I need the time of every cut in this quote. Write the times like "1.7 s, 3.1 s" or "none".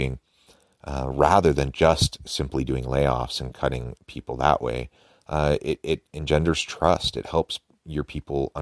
none